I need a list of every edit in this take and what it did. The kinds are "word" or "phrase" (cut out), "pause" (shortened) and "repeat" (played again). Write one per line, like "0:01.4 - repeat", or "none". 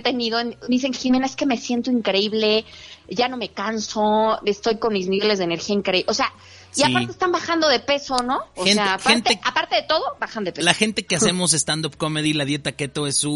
none